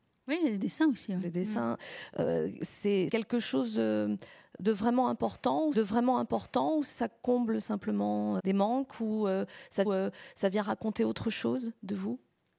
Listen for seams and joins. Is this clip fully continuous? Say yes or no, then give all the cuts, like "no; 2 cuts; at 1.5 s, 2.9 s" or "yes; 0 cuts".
no; 4 cuts; at 3.1 s, 5.7 s, 8.4 s, 9.8 s